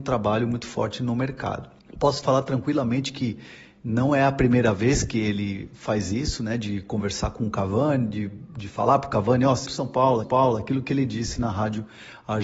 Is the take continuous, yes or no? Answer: no